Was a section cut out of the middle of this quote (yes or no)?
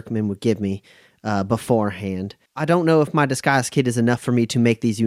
yes